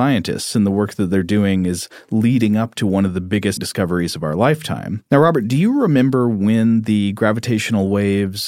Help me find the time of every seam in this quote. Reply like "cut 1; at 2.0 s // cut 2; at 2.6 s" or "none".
cut 1; at 3.6 s